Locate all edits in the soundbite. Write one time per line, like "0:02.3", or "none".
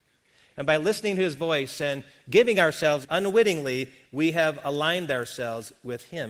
0:03.0